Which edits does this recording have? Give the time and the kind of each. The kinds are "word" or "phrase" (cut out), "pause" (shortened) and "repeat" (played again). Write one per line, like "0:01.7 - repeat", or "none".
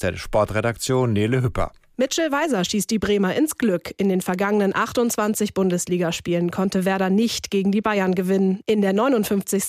none